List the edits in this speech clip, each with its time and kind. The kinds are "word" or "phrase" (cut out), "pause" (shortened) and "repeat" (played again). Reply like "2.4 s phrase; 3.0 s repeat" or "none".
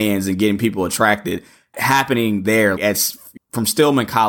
1.7 s word; 2.8 s word; 3.4 s word